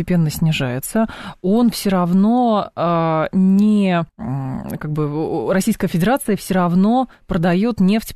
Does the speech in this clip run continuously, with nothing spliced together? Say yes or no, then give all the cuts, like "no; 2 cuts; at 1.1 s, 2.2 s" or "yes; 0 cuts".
no; 1 cut; at 4.1 s